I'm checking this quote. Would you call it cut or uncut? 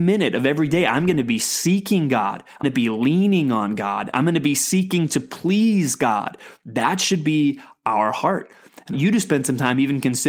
cut